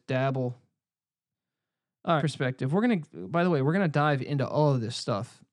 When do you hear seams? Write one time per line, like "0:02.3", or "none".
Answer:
0:02.2